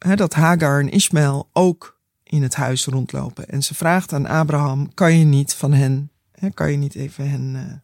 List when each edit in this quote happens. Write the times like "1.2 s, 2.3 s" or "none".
none